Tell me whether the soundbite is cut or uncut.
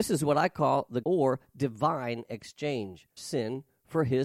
cut